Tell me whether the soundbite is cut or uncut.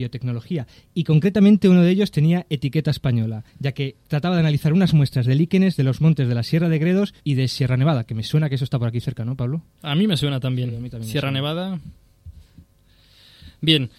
cut